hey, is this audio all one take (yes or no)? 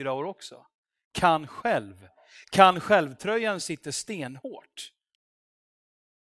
yes